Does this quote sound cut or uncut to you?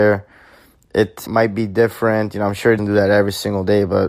cut